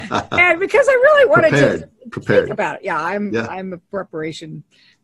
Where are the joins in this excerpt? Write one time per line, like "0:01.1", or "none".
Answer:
none